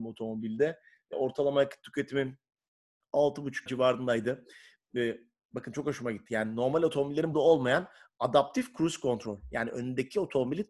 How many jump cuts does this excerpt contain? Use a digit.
3